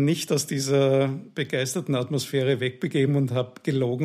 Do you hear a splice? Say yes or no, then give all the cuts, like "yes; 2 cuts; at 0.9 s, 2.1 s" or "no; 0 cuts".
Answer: no; 0 cuts